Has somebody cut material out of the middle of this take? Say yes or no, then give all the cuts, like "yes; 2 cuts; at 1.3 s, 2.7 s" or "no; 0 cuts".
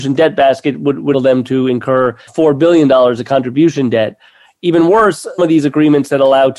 yes; 3 cuts; at 1.1 s, 2.3 s, 5.4 s